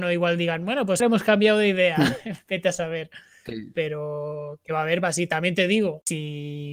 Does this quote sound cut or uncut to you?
cut